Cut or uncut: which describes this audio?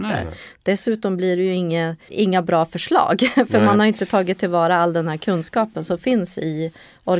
cut